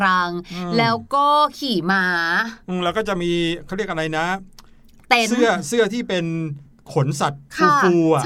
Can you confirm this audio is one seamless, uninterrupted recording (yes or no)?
yes